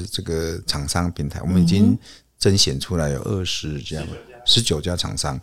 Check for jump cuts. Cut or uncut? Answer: uncut